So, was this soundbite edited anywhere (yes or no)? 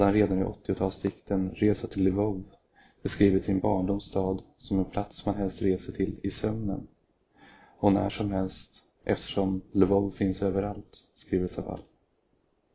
no